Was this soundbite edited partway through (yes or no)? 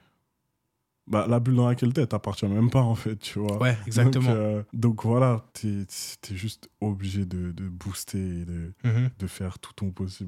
yes